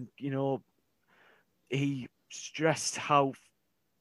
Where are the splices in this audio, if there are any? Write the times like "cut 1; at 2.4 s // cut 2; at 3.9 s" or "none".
cut 1; at 2.1 s

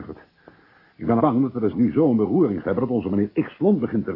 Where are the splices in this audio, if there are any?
cut 1; at 1.2 s // cut 2; at 1.7 s // cut 3; at 2.6 s

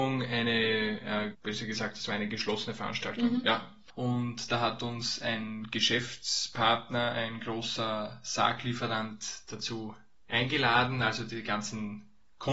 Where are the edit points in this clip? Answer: cut 1; at 1.3 s

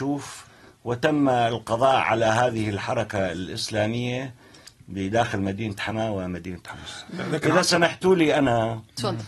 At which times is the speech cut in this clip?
none

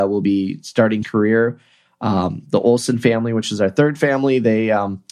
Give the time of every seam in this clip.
cut 1; at 1.0 s

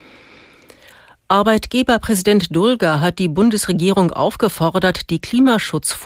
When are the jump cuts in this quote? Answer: none

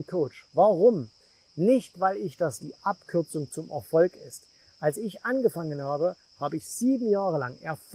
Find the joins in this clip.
cut 1; at 2.6 s

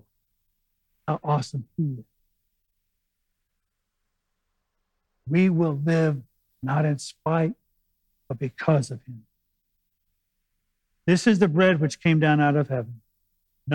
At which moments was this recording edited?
none

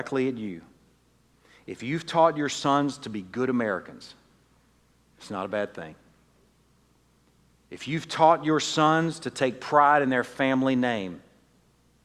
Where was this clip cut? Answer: none

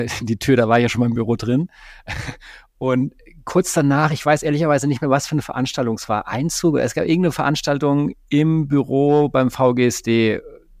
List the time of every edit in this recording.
none

